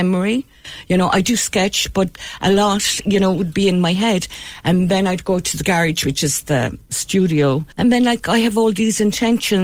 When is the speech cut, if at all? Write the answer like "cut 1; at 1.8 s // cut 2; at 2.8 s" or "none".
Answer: cut 1; at 7.7 s